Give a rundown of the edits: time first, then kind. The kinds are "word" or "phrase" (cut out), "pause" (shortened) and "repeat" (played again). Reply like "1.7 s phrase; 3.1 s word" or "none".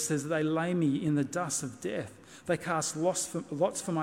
none